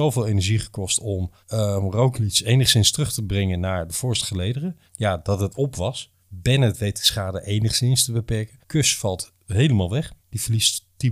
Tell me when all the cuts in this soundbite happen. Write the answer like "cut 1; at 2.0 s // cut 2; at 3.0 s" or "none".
cut 1; at 1.4 s // cut 2; at 4.9 s // cut 3; at 6.2 s // cut 4; at 8.6 s // cut 5; at 10.2 s